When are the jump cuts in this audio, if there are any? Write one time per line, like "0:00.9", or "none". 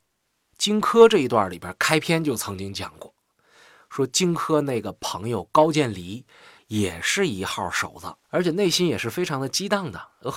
0:08.2